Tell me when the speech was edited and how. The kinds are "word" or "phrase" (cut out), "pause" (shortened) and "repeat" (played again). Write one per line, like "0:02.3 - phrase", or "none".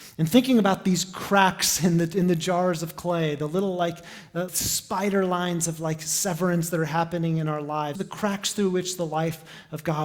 0:04.5 - word
0:07.9 - word

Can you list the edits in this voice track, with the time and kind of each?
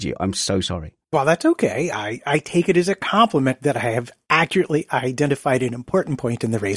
0:01.0 - pause

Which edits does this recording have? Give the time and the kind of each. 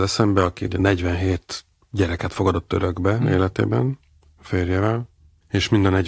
none

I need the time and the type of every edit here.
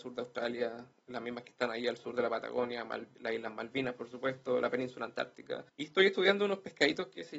0:05.7 - pause

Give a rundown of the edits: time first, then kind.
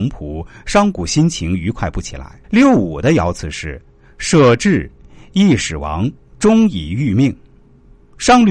0:02.4 - pause

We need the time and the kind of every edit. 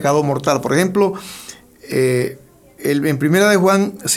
none

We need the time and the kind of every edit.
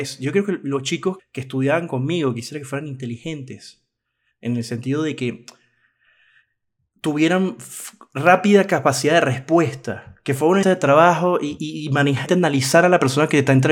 0:01.2 - word
0:10.6 - word
0:11.6 - word
0:12.3 - word

